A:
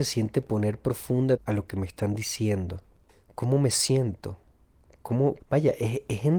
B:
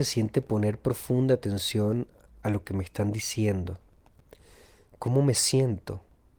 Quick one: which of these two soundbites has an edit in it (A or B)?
A